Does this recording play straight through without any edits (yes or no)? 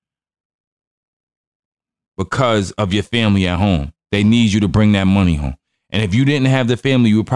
yes